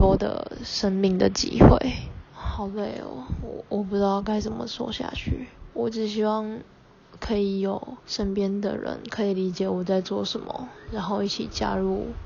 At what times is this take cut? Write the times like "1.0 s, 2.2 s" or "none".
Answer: 2.3 s, 5.7 s, 8.0 s